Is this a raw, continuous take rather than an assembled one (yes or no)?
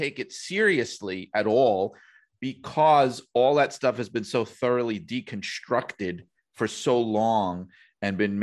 yes